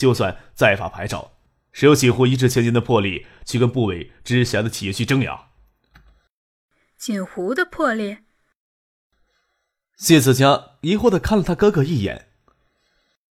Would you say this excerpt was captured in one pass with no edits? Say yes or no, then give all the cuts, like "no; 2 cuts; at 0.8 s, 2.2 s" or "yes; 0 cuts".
yes; 0 cuts